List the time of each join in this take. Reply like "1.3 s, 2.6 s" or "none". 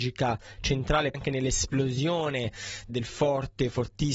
1.1 s, 2.9 s